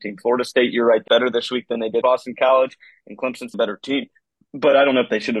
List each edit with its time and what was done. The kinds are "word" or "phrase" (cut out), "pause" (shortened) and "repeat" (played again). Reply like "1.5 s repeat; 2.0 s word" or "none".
1.1 s word; 2.0 s word; 3.5 s word